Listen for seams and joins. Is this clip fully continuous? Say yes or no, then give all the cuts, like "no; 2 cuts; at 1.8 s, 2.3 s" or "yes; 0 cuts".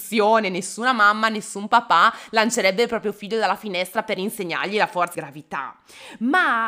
no; 1 cut; at 5.1 s